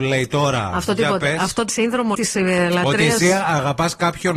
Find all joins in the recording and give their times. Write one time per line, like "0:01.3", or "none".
0:01.7
0:02.1